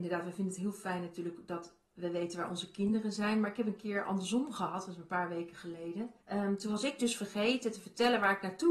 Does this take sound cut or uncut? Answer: cut